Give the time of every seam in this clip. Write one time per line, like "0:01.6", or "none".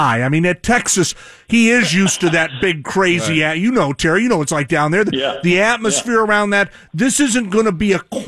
none